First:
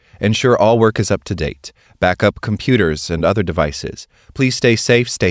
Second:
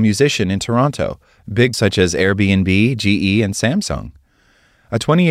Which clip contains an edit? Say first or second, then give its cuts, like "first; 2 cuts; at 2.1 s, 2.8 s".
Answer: second; 1 cut; at 1.7 s